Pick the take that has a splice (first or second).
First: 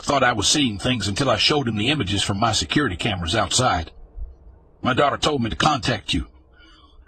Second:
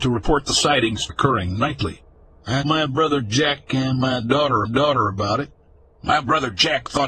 second